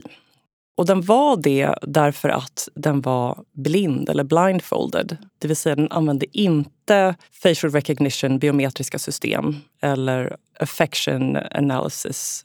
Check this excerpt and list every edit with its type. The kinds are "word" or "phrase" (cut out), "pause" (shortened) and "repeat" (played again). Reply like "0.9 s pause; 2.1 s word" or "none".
3.5 s pause; 5.3 s pause; 7.2 s pause

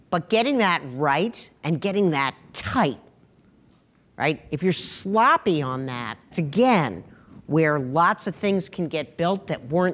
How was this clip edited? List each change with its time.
6.3 s word

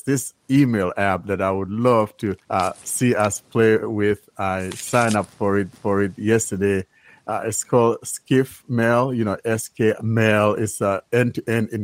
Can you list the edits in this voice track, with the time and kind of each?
2.4 s pause; 5.7 s repeat; 10.0 s phrase

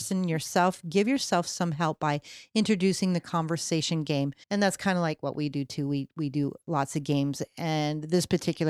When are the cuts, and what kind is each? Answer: 4.4 s pause

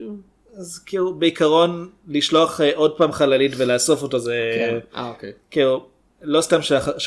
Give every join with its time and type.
none

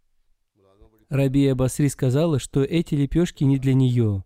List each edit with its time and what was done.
none

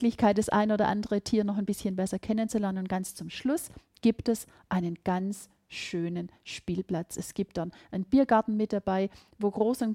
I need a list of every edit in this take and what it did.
none

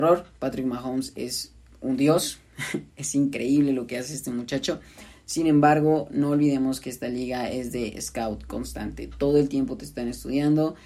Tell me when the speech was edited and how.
1.7 s pause

